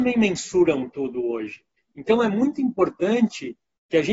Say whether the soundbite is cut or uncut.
cut